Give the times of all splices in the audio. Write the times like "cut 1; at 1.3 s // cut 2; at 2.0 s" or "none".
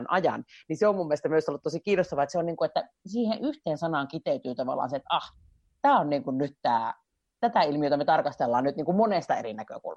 none